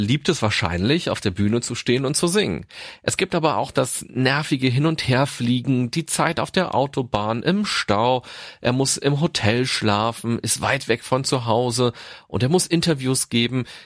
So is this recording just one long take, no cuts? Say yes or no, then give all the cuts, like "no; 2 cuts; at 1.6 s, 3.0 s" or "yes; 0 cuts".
yes; 0 cuts